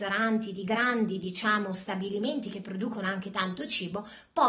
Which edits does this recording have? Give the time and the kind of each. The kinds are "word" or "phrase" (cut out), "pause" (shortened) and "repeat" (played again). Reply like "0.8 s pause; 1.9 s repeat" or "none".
none

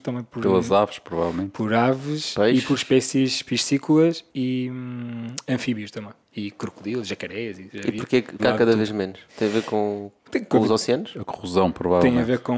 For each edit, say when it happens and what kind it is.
4.3 s word; 6.2 s pause; 7.7 s word; 8.4 s word; 9.3 s pause

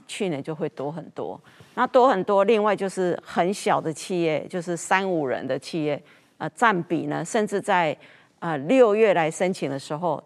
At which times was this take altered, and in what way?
none

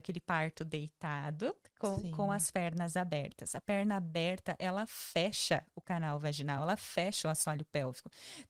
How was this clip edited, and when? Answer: none

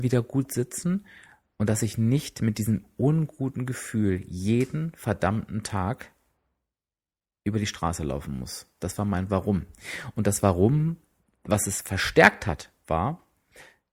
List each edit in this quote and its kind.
none

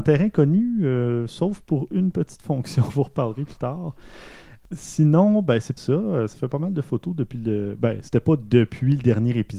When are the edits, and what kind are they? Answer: 2.9 s word; 5.8 s word

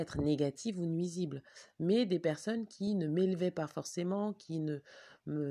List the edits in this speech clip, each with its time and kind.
none

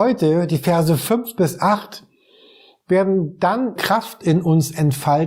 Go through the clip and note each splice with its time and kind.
3.8 s word

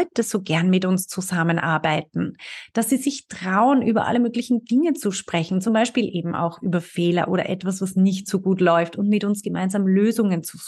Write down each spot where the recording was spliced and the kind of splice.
none

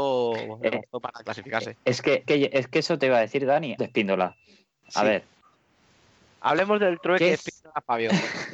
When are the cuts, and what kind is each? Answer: 2.3 s word; 3.8 s word

